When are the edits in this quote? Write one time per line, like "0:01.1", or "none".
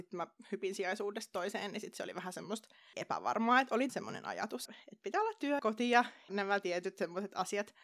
0:02.9
0:03.9
0:04.7
0:05.6
0:06.3